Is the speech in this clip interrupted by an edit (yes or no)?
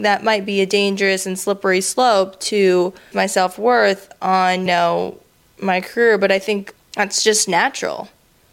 yes